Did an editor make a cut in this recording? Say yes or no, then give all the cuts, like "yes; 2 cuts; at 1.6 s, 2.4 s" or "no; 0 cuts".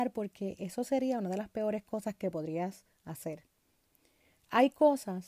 no; 0 cuts